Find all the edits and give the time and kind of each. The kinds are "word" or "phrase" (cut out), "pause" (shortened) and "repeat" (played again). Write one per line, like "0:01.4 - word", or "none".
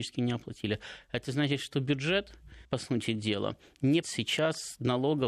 0:02.6 - pause
0:04.0 - word

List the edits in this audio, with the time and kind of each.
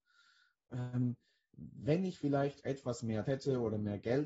0:03.2 - word

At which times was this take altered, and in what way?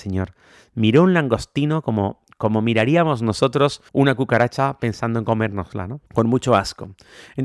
0:03.9 - pause
0:06.1 - pause

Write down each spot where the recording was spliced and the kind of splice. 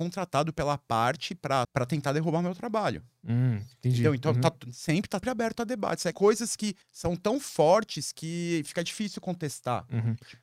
0:01.6 - phrase
0:05.2 - word
0:06.1 - phrase
0:06.8 - pause

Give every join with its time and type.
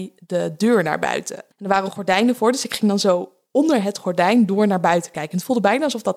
0:01.5 - pause

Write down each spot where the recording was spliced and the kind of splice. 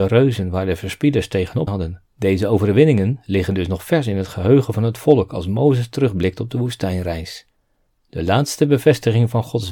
0:01.7 - word
0:02.1 - pause

